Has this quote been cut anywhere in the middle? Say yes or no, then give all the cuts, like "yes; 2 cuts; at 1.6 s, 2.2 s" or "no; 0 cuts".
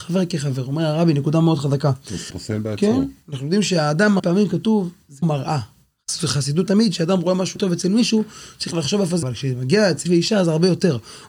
yes; 7 cuts; at 2.3 s, 4.2 s, 5.2 s, 6.7 s, 7.6 s, 9.2 s, 10.1 s